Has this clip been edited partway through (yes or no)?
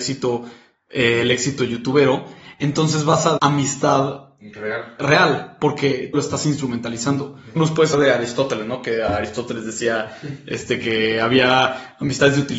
yes